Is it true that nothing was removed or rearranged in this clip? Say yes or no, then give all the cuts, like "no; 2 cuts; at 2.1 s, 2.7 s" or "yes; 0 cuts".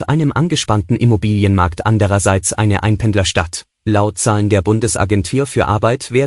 no; 1 cut; at 3.7 s